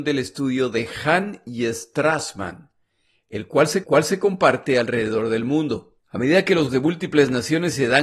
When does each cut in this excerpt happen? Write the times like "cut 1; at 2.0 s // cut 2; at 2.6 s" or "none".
cut 1; at 3.8 s // cut 2; at 6.0 s // cut 3; at 6.7 s